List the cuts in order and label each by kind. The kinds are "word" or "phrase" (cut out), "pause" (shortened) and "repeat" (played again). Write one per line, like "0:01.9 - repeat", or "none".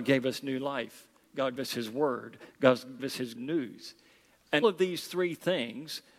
0:01.6 - word
0:03.0 - word
0:03.4 - word
0:04.6 - word

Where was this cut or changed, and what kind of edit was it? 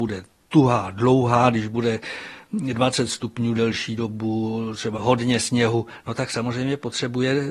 0:04.9 - word

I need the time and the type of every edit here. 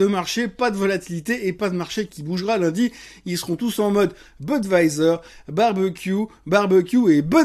none

